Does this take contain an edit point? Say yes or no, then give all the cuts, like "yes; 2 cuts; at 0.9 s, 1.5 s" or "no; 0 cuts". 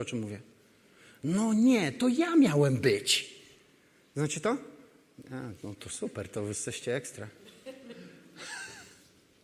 no; 0 cuts